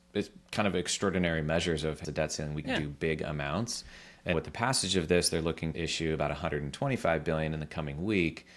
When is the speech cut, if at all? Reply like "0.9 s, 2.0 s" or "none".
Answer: 2.0 s, 2.6 s, 4.3 s, 5.7 s